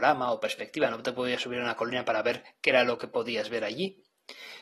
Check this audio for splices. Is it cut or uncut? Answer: uncut